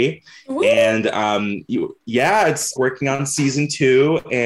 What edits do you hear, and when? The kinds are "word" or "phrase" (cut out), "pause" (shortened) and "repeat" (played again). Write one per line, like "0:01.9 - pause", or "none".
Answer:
0:02.8 - phrase